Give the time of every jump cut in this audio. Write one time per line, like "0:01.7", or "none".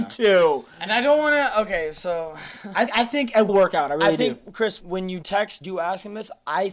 0:02.9
0:03.5
0:04.8
0:05.2
0:05.6